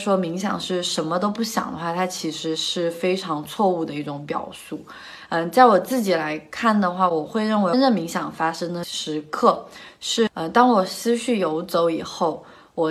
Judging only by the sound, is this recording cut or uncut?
uncut